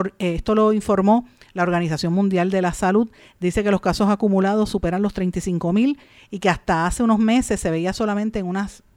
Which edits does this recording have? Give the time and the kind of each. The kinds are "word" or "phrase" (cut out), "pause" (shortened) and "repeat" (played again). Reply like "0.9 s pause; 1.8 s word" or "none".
none